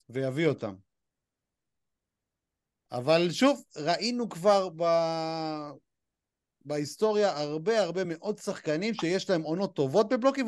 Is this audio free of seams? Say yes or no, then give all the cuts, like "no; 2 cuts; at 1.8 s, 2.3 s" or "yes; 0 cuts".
yes; 0 cuts